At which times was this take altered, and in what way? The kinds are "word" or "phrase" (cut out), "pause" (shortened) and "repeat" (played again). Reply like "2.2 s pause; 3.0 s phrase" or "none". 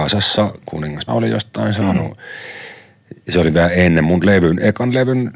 1.1 s word